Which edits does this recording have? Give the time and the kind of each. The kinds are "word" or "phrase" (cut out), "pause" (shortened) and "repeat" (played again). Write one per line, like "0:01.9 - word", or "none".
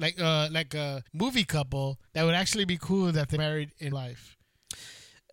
0:01.1 - pause
0:02.1 - pause
0:03.4 - word
0:03.9 - word